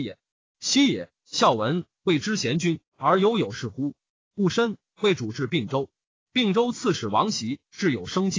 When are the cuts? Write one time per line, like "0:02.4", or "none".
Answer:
none